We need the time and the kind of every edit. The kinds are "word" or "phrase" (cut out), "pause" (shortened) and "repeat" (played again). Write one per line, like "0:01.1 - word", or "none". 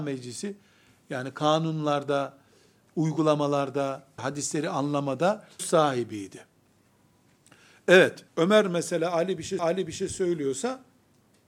0:04.2 - word
0:05.6 - word
0:08.3 - pause
0:09.6 - repeat